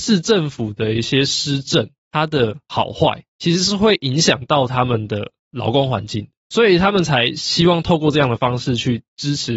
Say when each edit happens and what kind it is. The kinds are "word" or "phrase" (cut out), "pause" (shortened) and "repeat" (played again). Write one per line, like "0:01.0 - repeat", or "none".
0:02.0 - pause
0:06.4 - pause